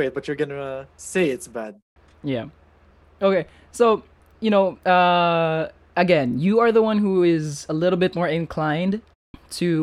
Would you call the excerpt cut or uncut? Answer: uncut